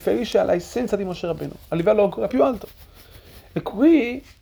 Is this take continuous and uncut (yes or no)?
no